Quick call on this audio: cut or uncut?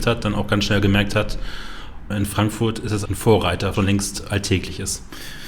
cut